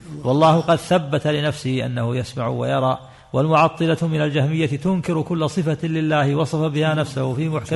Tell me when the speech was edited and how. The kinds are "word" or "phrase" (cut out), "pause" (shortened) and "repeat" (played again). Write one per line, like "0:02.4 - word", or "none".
none

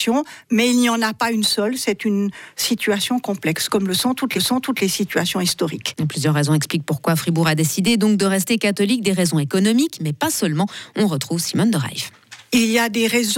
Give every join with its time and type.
0:04.3 - repeat

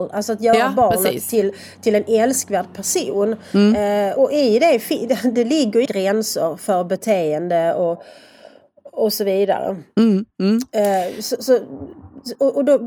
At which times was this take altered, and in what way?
0:04.2 - word
0:05.8 - phrase

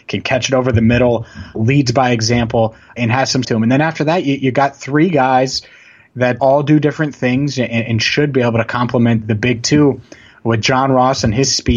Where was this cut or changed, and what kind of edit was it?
0:01.5 - word
0:03.0 - word
0:03.4 - word
0:06.4 - word
0:09.2 - word

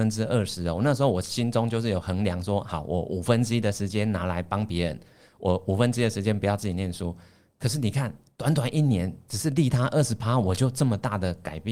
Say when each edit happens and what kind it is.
none

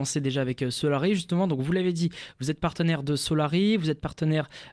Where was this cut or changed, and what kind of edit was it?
none

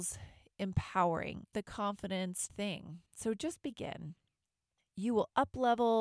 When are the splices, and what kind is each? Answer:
0:01.5 - phrase
0:02.5 - phrase
0:03.1 - pause

